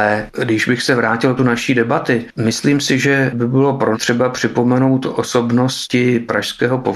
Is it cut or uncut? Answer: cut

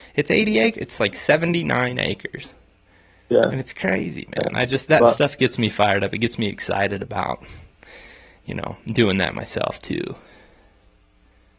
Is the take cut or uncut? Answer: uncut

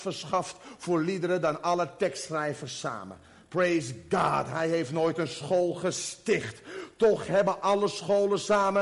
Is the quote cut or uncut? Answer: uncut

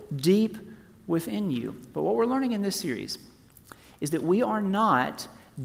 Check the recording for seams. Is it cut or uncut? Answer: uncut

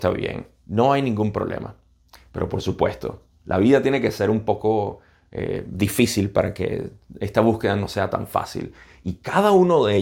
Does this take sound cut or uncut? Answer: uncut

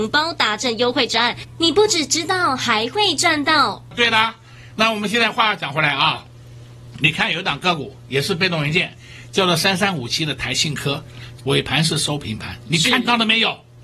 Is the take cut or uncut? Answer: cut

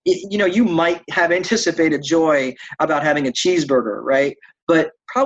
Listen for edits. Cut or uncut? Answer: uncut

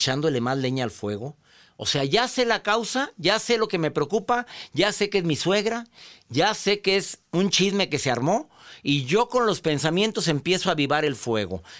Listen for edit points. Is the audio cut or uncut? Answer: uncut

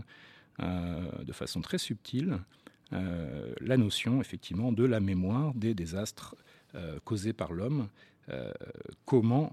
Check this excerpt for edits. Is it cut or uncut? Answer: uncut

